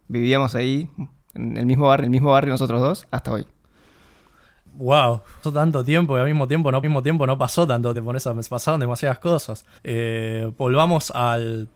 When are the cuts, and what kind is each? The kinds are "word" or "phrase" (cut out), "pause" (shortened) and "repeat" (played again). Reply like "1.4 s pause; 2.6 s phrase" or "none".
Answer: 2.0 s repeat; 5.4 s word; 6.8 s repeat; 7.9 s phrase; 9.8 s pause